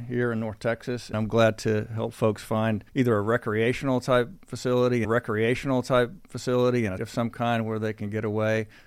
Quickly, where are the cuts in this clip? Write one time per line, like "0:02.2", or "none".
0:01.1
0:02.9
0:05.0
0:07.0